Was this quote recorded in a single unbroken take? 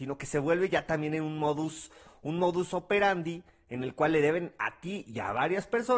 yes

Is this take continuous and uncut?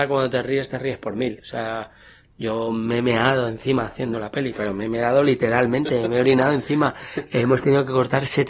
yes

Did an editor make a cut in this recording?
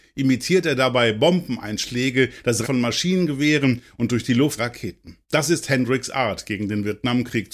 yes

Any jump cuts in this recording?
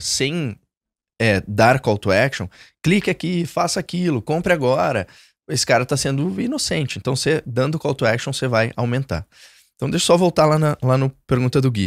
no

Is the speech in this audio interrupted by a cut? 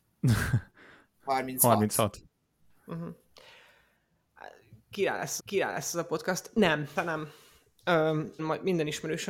yes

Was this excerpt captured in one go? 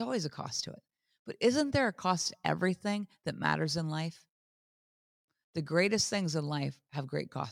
yes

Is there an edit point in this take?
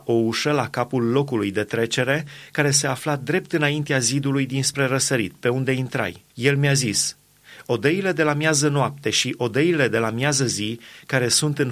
yes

